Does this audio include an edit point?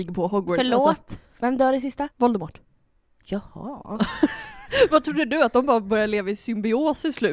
yes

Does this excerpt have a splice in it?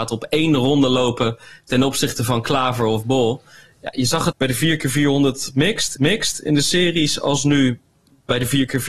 yes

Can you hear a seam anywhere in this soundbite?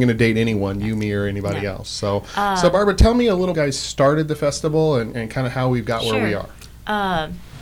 yes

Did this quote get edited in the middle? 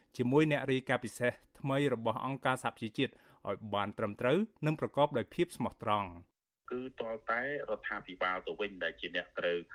no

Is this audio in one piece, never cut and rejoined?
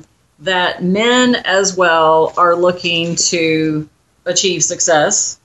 yes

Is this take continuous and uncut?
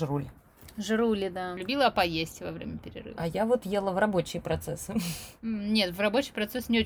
yes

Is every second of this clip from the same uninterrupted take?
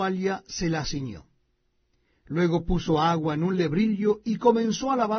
yes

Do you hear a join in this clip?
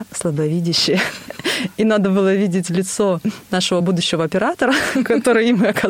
no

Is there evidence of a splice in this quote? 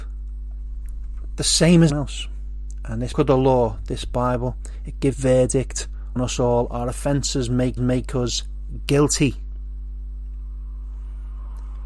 yes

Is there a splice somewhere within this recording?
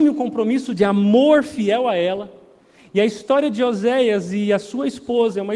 no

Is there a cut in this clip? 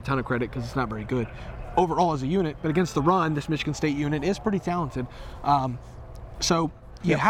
no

